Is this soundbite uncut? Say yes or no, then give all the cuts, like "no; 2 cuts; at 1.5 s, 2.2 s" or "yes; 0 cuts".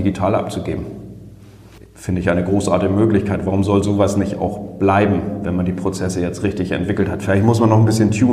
no; 1 cut; at 1.8 s